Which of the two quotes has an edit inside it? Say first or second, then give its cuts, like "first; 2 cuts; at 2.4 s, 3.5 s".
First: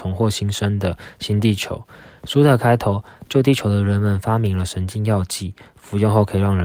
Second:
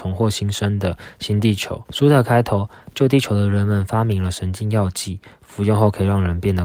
second; 1 cut; at 1.9 s